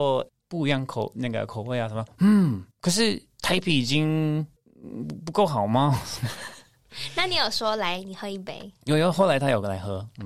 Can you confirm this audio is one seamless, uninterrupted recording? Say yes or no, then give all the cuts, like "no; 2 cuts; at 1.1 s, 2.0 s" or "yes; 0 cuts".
no; 1 cut; at 2.7 s